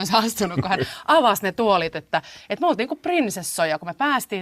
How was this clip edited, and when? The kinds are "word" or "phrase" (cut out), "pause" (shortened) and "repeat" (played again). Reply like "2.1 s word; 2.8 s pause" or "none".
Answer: none